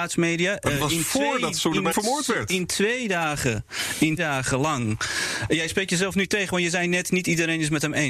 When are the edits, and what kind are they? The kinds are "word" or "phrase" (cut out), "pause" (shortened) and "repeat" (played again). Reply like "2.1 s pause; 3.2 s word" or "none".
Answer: 1.9 s word; 4.2 s word